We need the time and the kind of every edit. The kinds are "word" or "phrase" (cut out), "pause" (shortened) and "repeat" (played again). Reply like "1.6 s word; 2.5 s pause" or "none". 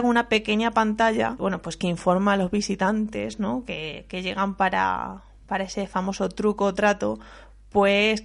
none